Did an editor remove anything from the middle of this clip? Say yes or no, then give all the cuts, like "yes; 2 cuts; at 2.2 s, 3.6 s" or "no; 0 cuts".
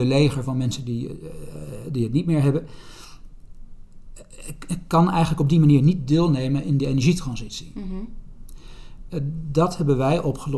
no; 0 cuts